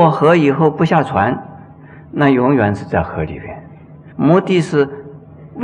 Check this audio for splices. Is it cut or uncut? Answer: cut